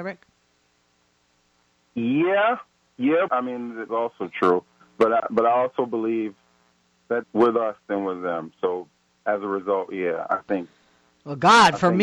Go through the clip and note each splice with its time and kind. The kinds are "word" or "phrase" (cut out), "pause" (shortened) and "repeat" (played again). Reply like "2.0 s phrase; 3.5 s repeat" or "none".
3.3 s word; 3.9 s phrase; 7.2 s phrase